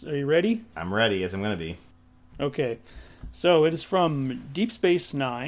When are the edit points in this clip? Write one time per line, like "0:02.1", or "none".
none